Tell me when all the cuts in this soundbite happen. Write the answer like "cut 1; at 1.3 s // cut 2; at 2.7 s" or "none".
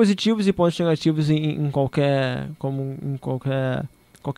none